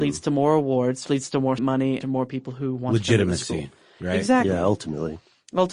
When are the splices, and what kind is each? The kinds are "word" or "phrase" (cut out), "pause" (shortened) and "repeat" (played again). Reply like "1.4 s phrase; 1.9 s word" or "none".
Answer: 1.0 s word; 1.6 s word; 2.0 s word